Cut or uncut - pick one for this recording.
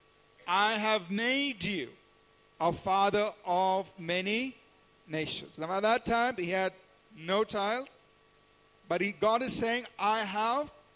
uncut